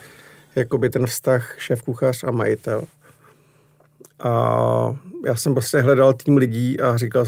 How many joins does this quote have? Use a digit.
0